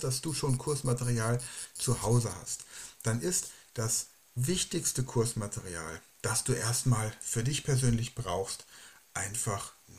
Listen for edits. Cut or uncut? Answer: uncut